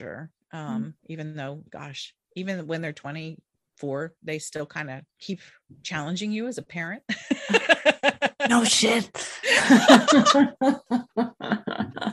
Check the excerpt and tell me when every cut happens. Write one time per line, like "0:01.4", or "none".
0:01.0
0:02.2
0:05.1